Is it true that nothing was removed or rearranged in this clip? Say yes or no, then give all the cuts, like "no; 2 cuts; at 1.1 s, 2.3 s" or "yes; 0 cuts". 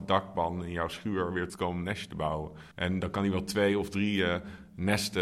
no; 2 cuts; at 1.5 s, 2.7 s